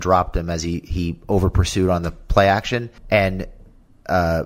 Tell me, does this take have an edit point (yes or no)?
yes